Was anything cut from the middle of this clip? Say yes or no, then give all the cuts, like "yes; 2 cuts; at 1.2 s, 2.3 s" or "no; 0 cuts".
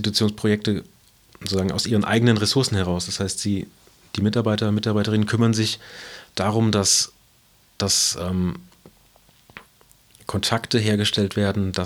no; 0 cuts